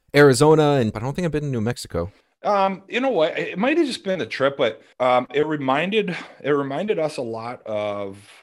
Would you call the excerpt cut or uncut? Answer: cut